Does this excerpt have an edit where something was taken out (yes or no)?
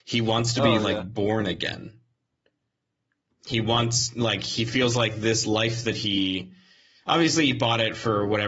no